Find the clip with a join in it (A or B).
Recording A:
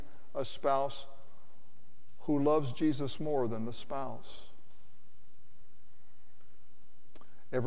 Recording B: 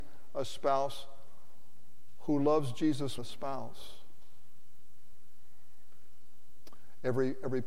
B